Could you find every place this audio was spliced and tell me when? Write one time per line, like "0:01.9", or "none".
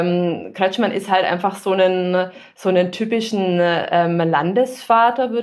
none